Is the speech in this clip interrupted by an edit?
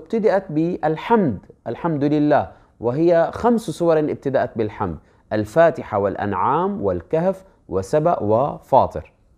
no; 0 cuts

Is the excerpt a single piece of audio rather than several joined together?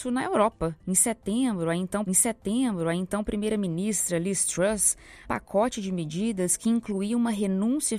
no; 2 cuts; at 2.1 s, 5.2 s

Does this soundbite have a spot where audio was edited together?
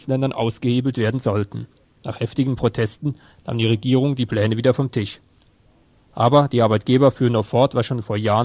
no; 0 cuts

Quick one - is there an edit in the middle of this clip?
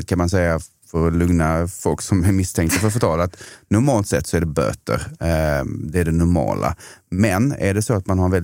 yes; 1 cut; at 4.5 s

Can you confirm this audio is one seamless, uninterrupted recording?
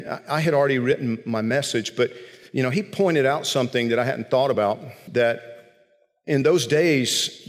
yes; 0 cuts

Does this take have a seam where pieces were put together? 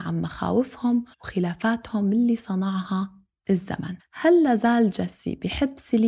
yes; 2 cuts; at 1.1 s, 4.0 s

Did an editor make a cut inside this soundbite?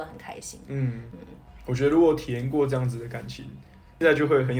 no; 0 cuts

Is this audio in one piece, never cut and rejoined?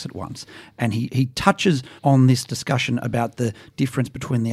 no; 1 cut; at 2.0 s

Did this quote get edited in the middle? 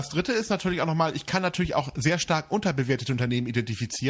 no; 0 cuts

